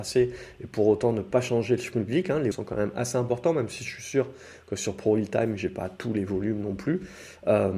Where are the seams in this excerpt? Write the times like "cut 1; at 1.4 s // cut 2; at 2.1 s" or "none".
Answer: cut 1; at 2.5 s